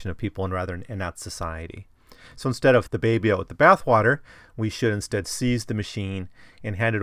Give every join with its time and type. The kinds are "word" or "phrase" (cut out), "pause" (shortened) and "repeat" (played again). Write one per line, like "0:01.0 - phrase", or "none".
0:02.9 - word

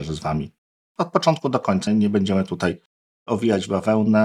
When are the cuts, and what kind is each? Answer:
0:01.9 - word

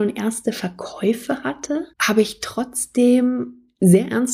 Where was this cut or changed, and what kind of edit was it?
0:01.9 - pause

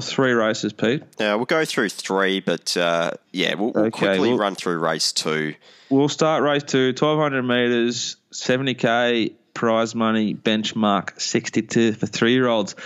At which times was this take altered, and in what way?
0:03.2 - pause

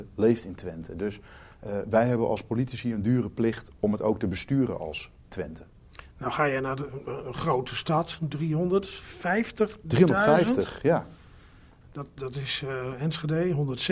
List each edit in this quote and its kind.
none

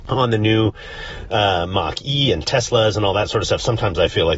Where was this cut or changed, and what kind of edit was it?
none

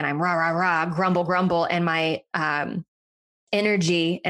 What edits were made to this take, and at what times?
none

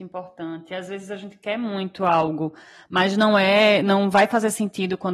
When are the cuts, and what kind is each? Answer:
none

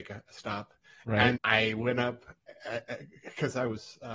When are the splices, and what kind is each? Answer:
0:01.4 - word

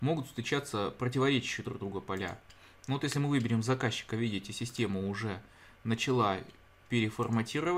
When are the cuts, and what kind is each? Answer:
none

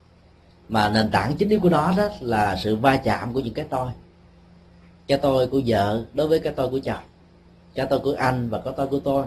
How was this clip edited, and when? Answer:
none

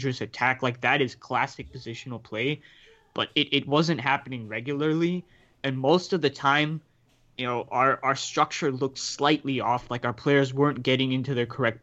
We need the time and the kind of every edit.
none

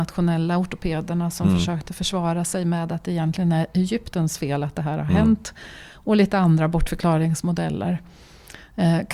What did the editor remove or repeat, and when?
none

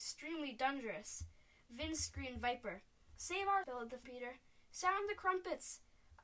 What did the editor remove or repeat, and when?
0:03.6 - word
0:04.0 - word

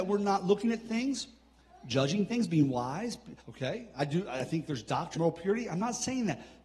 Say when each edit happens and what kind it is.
0:03.4 - pause
0:05.1 - word

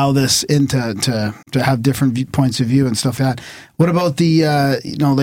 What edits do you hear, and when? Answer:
0:01.4 - pause
0:03.2 - word

